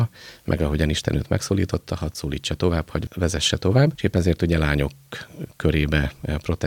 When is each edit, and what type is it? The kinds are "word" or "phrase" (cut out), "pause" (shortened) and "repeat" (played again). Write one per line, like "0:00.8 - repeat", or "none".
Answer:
none